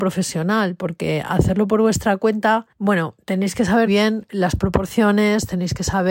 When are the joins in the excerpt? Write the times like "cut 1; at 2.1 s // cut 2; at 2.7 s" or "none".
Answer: cut 1; at 2.7 s // cut 2; at 3.9 s